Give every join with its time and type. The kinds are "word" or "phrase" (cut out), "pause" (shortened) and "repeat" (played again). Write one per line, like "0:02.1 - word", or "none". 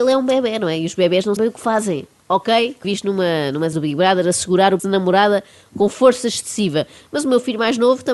0:01.4 - word
0:02.8 - word
0:03.7 - word
0:04.8 - word